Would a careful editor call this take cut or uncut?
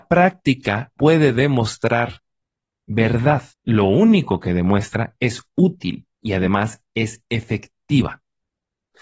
cut